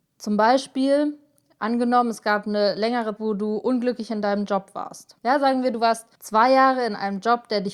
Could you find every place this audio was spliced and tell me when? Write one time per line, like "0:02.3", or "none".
0:03.2
0:05.2
0:06.1